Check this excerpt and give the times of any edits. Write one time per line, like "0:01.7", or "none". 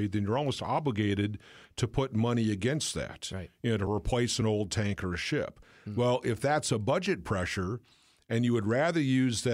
none

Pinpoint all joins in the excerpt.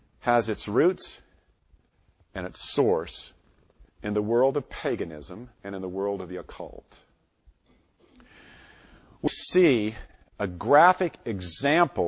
0:03.9
0:05.5
0:09.3

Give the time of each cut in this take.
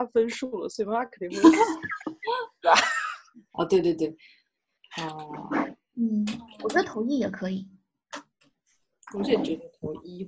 none

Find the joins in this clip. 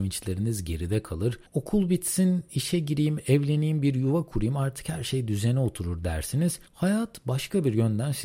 0:01.5
0:06.7

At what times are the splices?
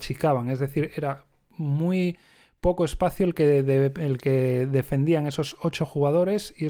none

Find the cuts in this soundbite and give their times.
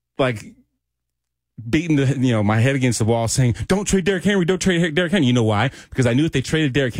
none

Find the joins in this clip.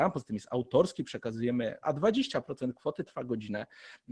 0:01.8
0:03.1

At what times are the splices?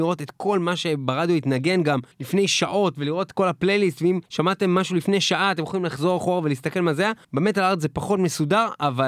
0:02.1
0:04.3
0:07.2

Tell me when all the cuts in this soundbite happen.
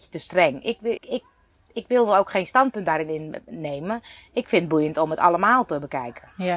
0:01.0

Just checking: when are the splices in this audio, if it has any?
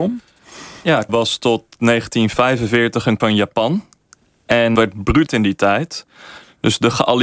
0:01.1
0:03.2
0:04.7
0:05.3

